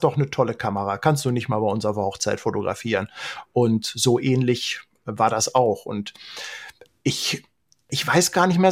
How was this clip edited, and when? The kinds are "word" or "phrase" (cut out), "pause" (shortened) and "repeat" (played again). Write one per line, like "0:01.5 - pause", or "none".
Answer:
none

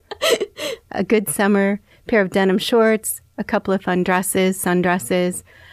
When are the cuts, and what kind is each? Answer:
none

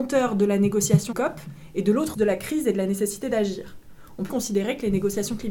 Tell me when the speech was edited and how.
0:01.1 - phrase
0:02.1 - word
0:04.3 - word

